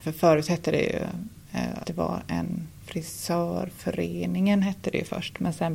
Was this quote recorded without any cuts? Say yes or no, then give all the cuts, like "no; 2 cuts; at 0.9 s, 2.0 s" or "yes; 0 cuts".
no; 2 cuts; at 1.8 s, 2.8 s